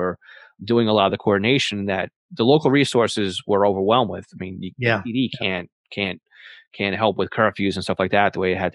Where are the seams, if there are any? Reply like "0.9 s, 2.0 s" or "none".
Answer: none